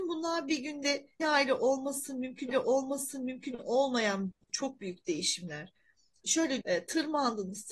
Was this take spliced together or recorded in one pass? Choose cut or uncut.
cut